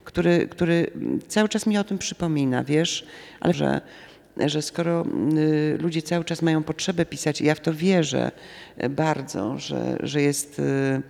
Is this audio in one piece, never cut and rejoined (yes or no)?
no